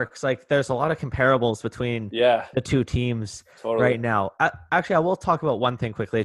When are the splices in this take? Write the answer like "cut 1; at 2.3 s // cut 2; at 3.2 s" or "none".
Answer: none